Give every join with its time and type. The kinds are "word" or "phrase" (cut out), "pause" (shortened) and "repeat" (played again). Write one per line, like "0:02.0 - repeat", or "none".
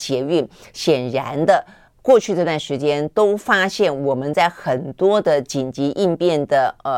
0:01.9 - pause